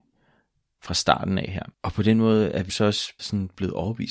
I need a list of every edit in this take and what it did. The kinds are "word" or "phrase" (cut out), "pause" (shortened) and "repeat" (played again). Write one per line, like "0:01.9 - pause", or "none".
0:01.7 - pause
0:02.7 - word
0:03.2 - word